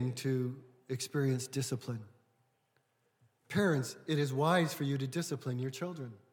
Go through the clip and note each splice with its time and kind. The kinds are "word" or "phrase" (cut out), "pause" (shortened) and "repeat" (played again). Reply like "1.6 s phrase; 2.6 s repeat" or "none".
none